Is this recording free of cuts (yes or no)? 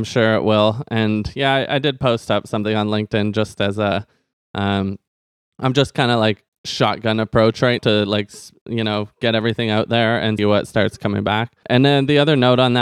no